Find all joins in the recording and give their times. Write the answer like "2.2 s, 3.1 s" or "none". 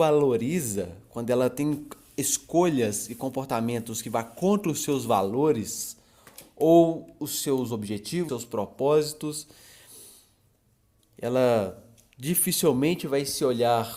8.3 s